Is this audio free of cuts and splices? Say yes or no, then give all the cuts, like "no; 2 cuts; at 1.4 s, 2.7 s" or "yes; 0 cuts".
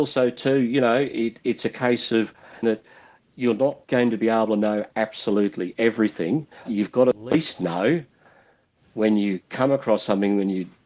no; 3 cuts; at 2.6 s, 3.8 s, 6.7 s